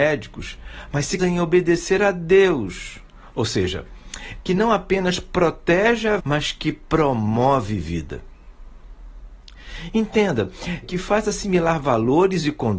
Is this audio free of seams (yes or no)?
no